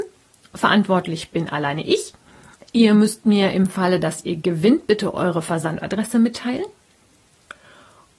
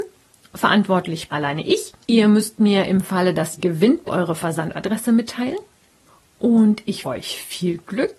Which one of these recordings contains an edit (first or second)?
second